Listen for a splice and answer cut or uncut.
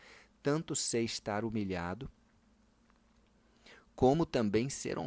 uncut